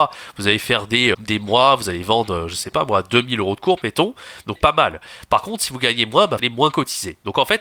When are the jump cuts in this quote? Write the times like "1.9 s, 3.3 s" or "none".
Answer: 1.1 s, 4.6 s, 6.4 s